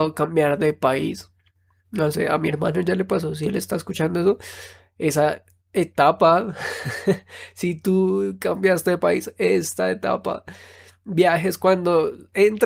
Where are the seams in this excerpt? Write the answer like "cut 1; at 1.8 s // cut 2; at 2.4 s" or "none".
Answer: none